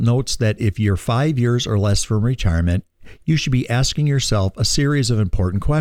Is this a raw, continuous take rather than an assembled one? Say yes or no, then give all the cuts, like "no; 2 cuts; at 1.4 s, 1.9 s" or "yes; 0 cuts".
yes; 0 cuts